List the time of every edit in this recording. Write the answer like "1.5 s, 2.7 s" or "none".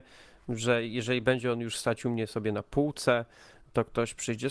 none